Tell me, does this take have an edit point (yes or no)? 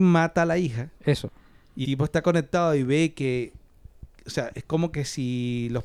yes